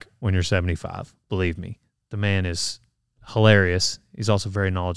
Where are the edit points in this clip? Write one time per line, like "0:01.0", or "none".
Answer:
none

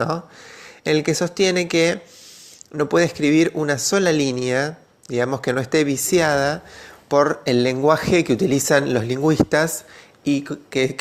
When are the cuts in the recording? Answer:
none

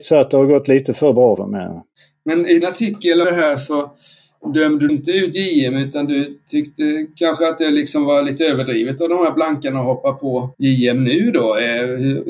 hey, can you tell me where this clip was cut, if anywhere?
0:01.4
0:01.9
0:02.6
0:03.2
0:04.9
0:10.5

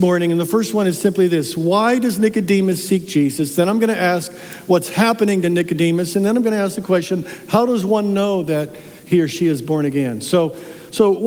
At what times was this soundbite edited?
none

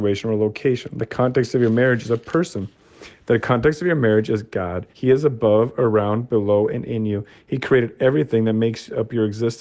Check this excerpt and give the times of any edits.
0:04.9

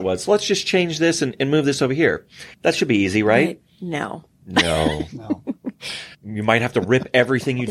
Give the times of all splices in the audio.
0:02.5
0:06.1

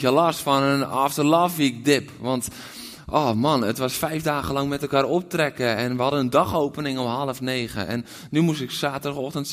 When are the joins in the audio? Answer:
none

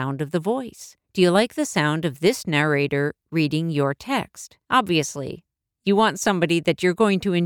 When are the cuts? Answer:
0:01.0
0:04.6

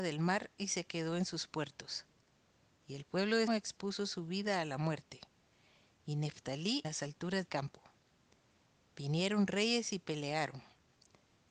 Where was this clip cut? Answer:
0:03.5
0:06.8
0:07.5

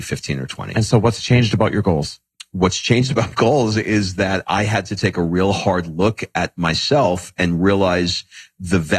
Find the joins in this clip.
0:03.3

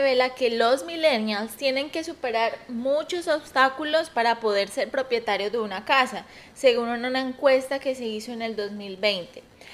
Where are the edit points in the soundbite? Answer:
none

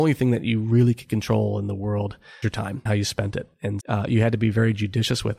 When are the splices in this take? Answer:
0:02.4
0:02.9
0:03.8

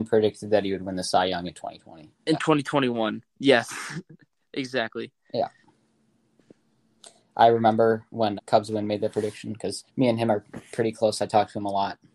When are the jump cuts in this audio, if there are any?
0:08.4
0:09.9

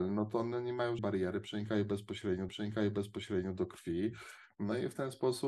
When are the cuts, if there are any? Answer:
0:01.0
0:02.5

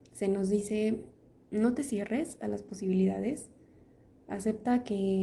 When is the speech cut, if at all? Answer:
none

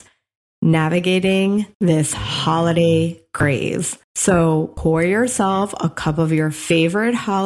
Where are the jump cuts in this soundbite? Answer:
0:01.7
0:04.0

